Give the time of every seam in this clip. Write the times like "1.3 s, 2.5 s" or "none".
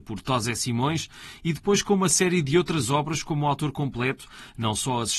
none